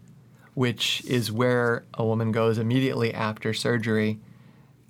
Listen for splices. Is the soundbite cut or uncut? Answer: uncut